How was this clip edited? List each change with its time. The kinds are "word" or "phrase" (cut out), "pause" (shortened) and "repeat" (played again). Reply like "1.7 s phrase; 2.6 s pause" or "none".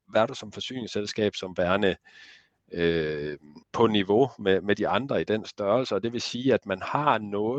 3.6 s pause